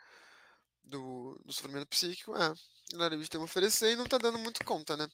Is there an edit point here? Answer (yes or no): no